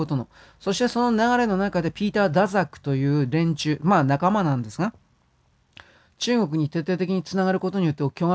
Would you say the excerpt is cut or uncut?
uncut